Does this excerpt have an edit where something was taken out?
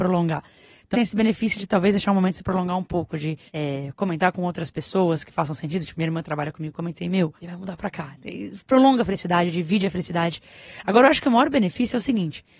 yes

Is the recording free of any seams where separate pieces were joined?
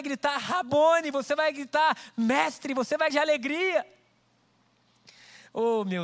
no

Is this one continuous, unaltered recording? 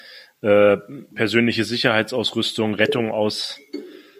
yes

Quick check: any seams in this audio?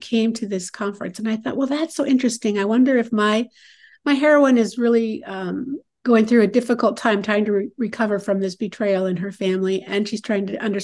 no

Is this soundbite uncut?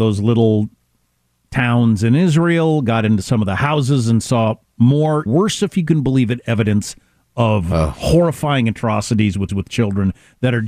no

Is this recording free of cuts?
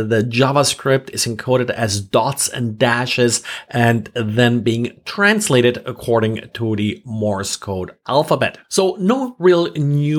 no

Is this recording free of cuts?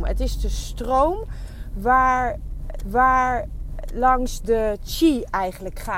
no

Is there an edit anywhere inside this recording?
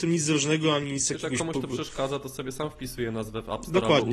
no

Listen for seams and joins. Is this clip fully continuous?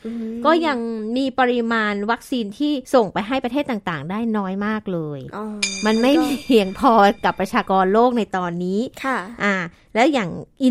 no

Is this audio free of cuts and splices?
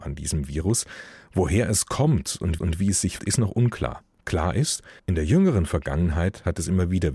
no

